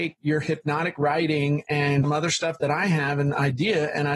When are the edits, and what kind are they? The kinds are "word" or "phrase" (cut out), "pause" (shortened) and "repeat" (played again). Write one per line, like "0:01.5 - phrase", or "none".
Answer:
0:02.0 - word